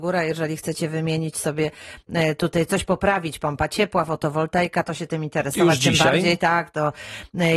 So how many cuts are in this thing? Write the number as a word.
one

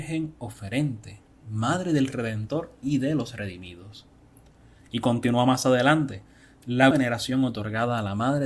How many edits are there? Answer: one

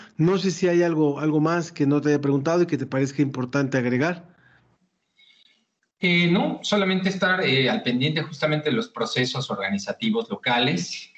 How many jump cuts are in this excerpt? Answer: zero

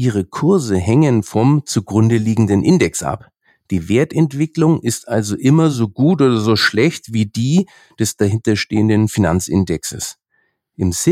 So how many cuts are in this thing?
zero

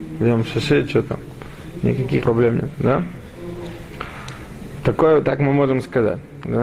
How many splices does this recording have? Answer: two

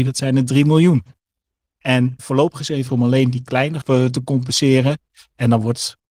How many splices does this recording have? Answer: three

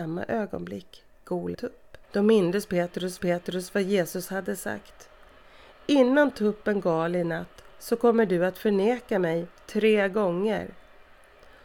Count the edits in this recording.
three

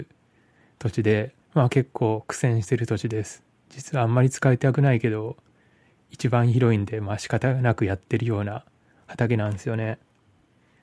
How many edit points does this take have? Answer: one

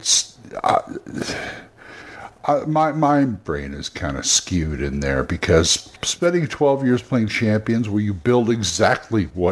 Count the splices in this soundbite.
one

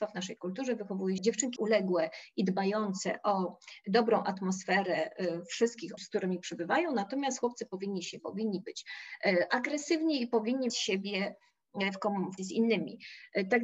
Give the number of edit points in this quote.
six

